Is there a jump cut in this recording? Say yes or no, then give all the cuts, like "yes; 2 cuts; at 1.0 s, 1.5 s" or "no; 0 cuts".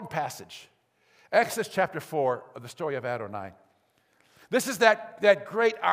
no; 0 cuts